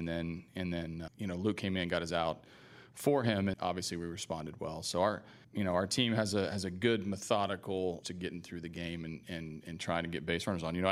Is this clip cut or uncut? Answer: cut